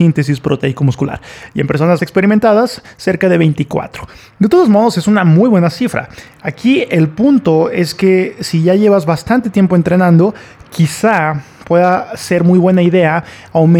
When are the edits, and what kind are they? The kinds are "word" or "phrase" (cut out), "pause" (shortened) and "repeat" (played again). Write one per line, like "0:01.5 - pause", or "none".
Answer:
0:02.0 - word